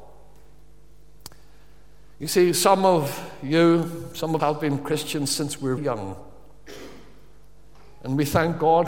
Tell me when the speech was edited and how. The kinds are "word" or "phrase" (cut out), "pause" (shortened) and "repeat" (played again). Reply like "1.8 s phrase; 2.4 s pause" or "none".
4.4 s word; 5.8 s word